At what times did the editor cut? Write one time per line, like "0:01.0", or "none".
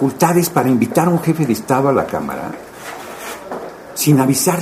none